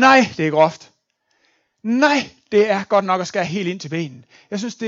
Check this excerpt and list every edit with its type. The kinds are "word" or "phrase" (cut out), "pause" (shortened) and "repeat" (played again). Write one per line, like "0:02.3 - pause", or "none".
none